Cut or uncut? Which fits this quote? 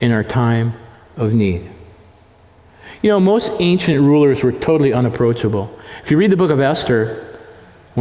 uncut